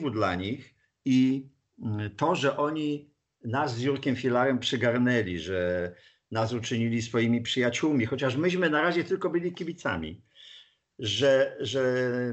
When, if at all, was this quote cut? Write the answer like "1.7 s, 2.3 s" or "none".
none